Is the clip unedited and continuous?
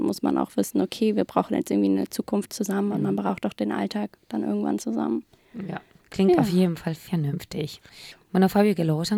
yes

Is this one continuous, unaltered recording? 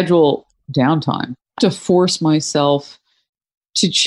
no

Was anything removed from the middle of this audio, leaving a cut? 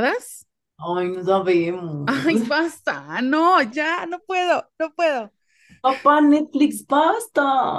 no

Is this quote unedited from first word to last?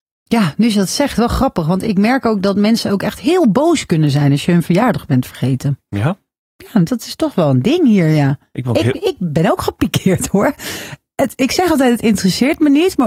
yes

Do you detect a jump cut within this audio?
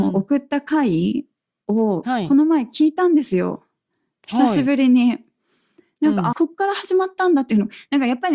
yes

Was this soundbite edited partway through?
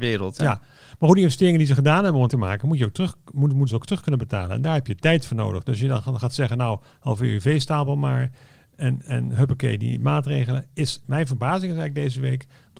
yes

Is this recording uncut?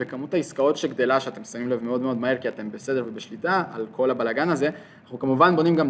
yes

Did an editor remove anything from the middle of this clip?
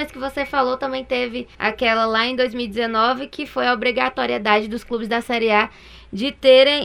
yes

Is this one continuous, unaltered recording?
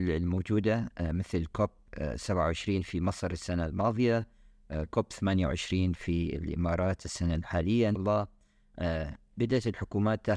no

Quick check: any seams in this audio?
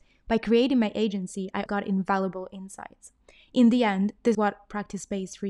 yes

